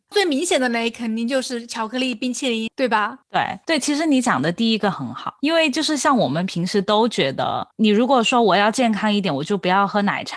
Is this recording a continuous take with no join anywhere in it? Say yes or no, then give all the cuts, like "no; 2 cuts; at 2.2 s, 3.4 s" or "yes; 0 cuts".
no; 1 cut; at 2.7 s